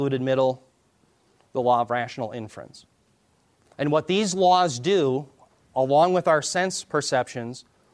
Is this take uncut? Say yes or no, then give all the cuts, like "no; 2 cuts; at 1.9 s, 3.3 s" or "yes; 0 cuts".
yes; 0 cuts